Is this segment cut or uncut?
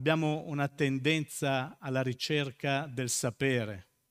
uncut